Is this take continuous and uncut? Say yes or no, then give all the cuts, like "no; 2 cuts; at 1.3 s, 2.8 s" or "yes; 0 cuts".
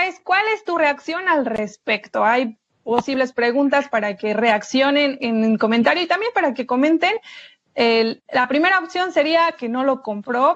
yes; 0 cuts